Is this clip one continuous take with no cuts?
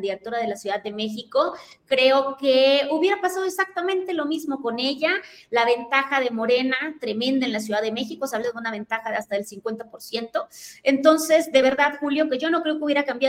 yes; 0 cuts

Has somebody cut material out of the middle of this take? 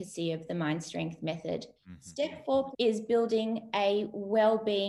yes; 2 cuts; at 1.8 s, 2.7 s

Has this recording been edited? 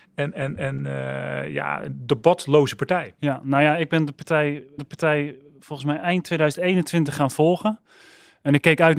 yes; 1 cut; at 4.8 s

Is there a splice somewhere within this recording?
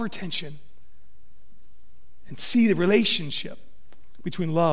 no; 0 cuts

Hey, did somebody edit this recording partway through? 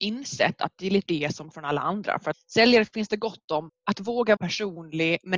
yes; 5 cuts; at 1.1 s, 1.5 s, 2.3 s, 3.7 s, 4.4 s

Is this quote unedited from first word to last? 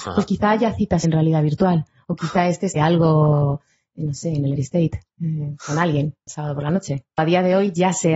no; 5 cuts; at 1.0 s, 2.8 s, 4.6 s, 6.3 s, 7.2 s

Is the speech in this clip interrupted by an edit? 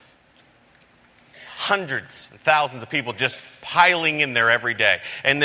no; 0 cuts

